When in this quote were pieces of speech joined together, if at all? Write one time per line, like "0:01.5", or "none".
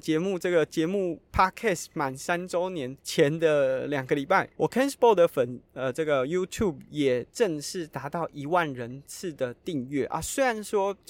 0:03.0
0:04.5